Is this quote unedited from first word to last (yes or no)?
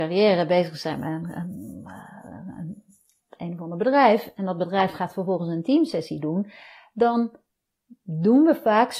yes